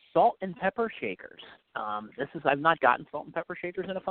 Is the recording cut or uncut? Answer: cut